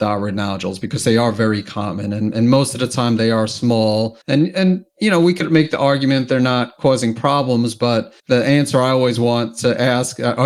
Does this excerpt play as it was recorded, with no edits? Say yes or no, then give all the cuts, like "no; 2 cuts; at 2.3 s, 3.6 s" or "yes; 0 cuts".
no; 2 cuts; at 4.2 s, 8.2 s